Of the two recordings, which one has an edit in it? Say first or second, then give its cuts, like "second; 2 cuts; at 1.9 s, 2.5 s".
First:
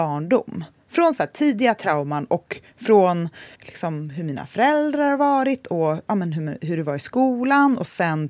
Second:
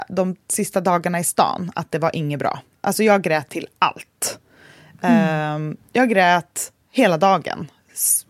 first; 1 cut; at 3.5 s